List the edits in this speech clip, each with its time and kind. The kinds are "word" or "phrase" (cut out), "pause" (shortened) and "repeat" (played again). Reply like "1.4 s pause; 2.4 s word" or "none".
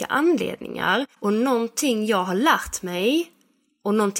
1.1 s pause